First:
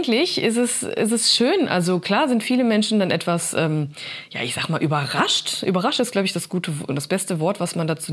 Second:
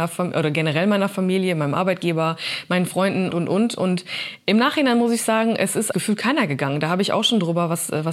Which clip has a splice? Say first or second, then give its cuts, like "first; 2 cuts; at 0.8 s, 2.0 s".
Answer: second; 2 cuts; at 3.3 s, 5.9 s